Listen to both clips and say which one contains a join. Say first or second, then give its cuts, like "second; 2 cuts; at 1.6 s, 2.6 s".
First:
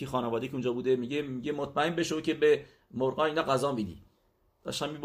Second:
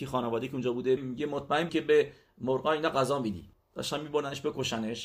second; 3 cuts; at 1.0 s, 1.7 s, 3.5 s